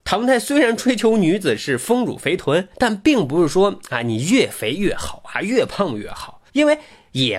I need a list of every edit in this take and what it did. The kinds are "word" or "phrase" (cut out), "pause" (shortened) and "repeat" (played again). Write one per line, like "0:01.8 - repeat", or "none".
0:02.7 - pause
0:06.5 - pause